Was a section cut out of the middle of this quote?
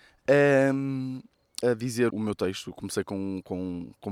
yes; 2 cuts; at 1.6 s, 2.1 s

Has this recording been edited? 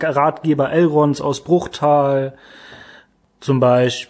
no; 0 cuts

